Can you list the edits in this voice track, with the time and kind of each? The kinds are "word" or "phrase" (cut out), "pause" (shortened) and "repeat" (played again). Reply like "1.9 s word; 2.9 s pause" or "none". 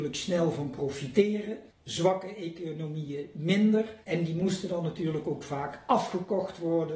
1.7 s pause; 4.0 s pause